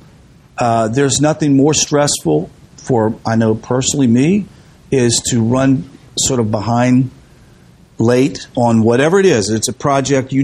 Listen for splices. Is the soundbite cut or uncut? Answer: uncut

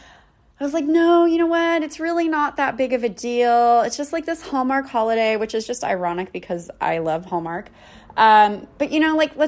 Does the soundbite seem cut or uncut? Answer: uncut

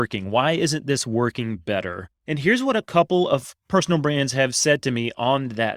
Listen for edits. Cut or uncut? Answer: cut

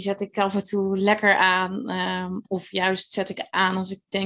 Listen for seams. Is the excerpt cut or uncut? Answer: uncut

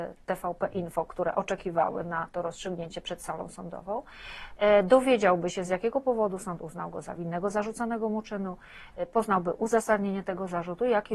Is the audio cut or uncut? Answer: uncut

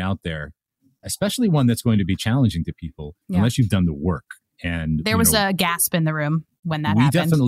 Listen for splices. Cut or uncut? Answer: cut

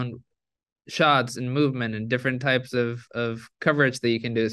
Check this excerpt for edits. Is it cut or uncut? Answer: uncut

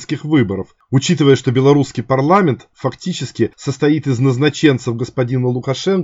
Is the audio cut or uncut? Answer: uncut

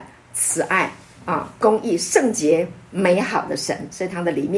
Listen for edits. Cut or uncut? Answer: uncut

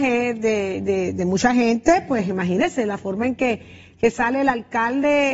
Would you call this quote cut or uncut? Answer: uncut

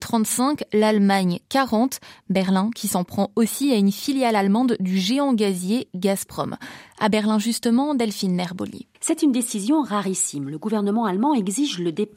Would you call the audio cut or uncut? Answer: cut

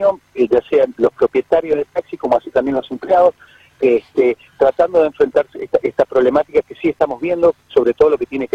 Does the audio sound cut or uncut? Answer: uncut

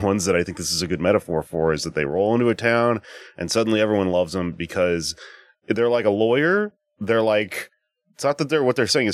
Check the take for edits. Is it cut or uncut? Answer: uncut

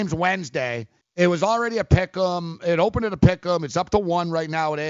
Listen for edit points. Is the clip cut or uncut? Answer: cut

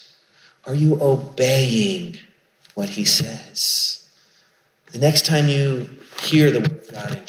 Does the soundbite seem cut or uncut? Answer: uncut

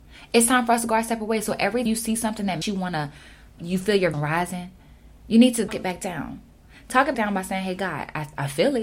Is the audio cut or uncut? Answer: cut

